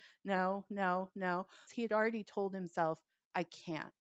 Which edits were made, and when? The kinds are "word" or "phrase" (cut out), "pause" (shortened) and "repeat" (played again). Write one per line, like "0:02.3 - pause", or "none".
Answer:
0:01.7 - word

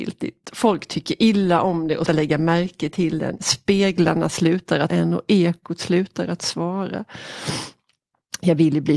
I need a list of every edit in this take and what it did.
0:02.1 - word
0:04.9 - word

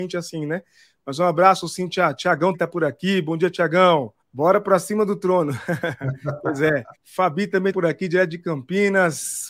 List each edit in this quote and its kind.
0:02.5 - word
0:04.2 - pause
0:06.9 - pause
0:07.7 - word

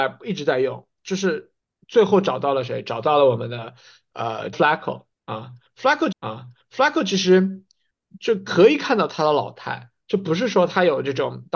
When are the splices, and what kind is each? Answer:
0:01.0 - word
0:04.5 - word
0:06.1 - repeat

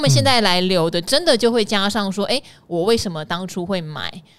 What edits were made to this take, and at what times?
none

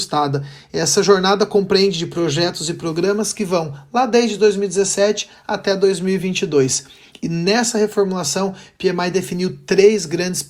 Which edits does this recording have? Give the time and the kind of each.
none

